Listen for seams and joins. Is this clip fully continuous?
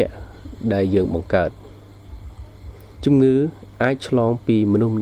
no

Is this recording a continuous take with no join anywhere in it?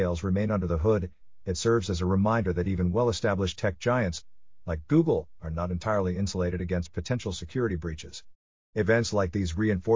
yes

